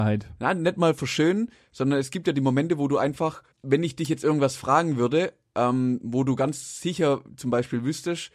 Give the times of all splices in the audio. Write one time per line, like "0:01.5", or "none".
0:03.5